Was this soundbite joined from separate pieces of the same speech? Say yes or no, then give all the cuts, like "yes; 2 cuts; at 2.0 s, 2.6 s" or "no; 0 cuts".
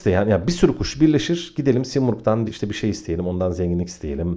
yes; 1 cut; at 2.5 s